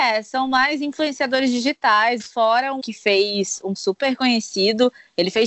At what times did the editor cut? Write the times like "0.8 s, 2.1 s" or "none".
2.2 s, 2.8 s, 3.7 s

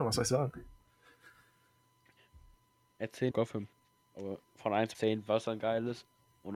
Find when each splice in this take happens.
3.3 s, 4.9 s, 5.6 s

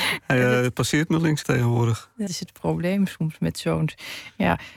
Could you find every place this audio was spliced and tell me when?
1.4 s, 2.3 s

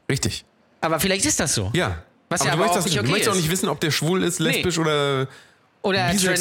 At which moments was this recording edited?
2.8 s

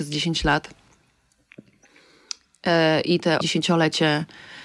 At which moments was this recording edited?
3.4 s

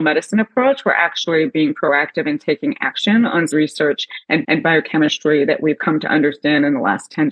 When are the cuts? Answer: 3.5 s, 4.4 s

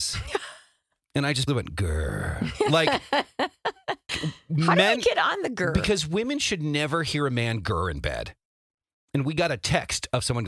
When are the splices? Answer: 1.5 s, 4.1 s

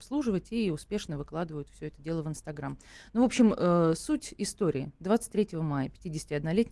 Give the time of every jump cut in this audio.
none

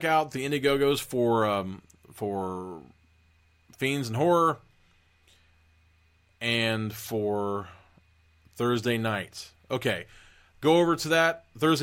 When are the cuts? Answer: none

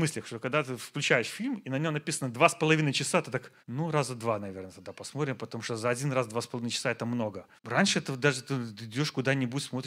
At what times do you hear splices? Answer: 3.6 s, 7.6 s

